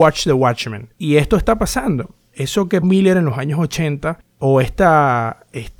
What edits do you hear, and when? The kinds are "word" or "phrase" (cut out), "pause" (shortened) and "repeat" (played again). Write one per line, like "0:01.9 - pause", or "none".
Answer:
0:00.9 - pause
0:02.8 - word
0:04.2 - pause